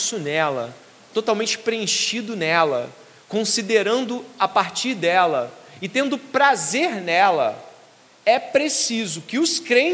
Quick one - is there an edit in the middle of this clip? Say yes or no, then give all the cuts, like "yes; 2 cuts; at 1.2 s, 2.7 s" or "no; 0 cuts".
no; 0 cuts